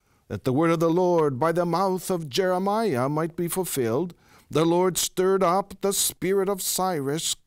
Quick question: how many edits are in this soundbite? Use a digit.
0